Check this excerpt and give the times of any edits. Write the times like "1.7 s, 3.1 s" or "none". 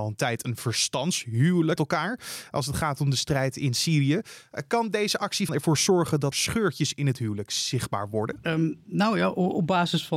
1.8 s, 5.5 s, 6.3 s